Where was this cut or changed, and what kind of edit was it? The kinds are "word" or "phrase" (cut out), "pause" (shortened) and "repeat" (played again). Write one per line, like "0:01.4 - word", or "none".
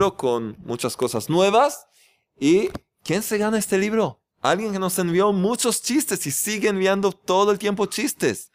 0:04.3 - pause